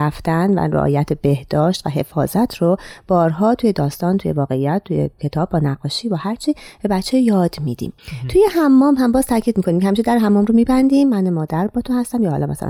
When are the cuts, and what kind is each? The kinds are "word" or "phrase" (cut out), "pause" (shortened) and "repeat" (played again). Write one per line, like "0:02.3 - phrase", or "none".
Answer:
0:08.0 - pause